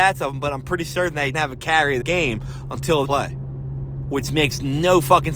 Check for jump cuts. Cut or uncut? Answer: cut